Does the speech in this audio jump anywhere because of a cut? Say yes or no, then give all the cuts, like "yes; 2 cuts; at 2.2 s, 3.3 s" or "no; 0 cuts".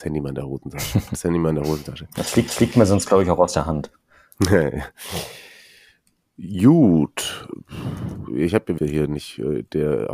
yes; 3 cuts; at 1.1 s, 2.5 s, 8.8 s